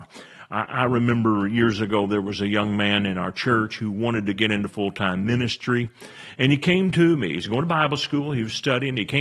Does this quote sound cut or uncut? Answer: uncut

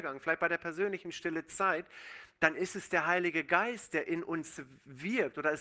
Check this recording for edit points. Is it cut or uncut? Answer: uncut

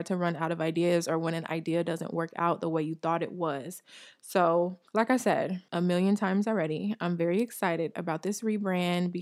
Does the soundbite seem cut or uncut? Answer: cut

